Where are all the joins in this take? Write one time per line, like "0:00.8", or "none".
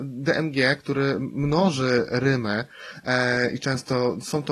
none